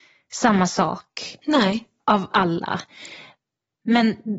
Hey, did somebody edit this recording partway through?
no; 0 cuts

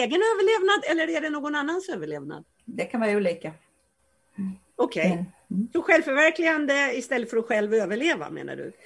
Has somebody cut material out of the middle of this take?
no; 0 cuts

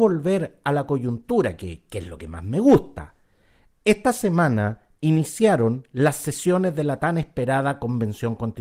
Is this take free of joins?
yes; 0 cuts

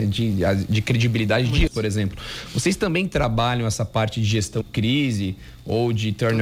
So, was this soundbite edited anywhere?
yes; 2 cuts; at 1.7 s, 4.6 s

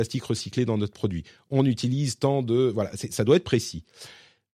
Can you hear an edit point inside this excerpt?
no; 0 cuts

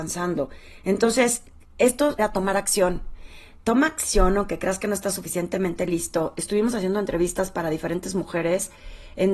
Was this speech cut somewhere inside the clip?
yes; 1 cut; at 2.2 s

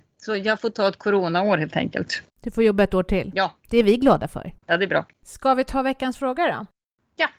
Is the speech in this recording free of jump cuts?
no; 2 cuts; at 2.3 s, 4.6 s

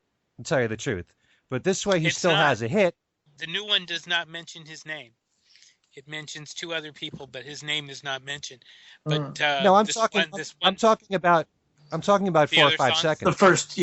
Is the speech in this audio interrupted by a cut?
no; 0 cuts

